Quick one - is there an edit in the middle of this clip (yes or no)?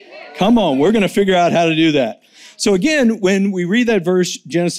no